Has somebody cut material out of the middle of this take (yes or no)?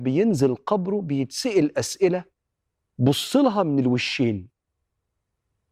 no